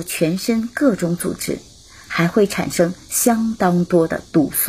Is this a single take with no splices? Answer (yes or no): yes